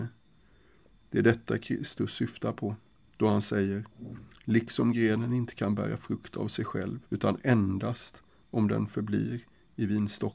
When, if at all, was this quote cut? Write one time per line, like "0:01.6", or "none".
0:07.0